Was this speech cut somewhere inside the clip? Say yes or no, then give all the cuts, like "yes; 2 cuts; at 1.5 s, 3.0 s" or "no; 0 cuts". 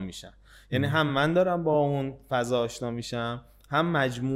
no; 0 cuts